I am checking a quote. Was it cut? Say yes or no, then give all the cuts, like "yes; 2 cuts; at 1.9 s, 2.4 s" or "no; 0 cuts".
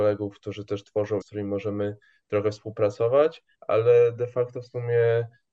yes; 2 cuts; at 1.2 s, 3.5 s